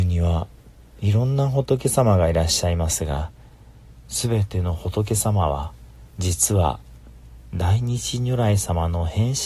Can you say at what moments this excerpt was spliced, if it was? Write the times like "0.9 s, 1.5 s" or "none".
6.1 s